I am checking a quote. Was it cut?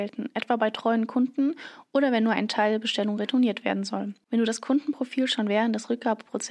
no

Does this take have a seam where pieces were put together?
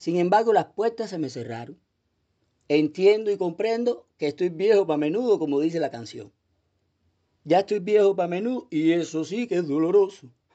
no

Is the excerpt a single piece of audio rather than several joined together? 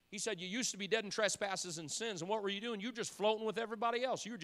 yes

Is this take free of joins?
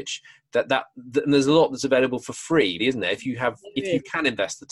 no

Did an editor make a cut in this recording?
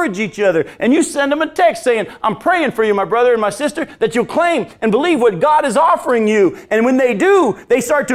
no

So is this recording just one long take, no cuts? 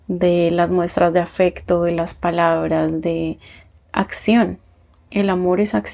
yes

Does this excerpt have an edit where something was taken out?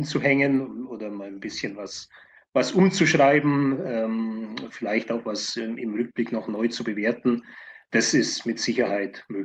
no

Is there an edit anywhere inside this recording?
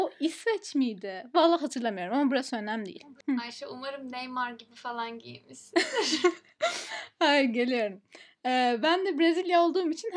no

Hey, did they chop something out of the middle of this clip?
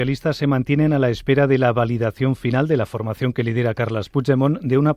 no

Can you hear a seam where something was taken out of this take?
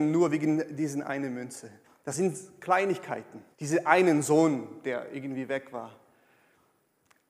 yes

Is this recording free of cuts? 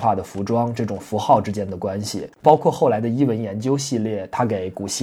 no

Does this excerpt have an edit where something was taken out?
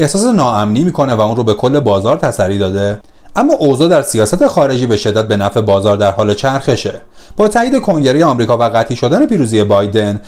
no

